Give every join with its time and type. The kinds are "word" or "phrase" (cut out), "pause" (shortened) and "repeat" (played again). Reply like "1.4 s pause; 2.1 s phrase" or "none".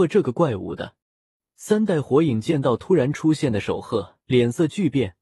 1.0 s pause; 4.2 s pause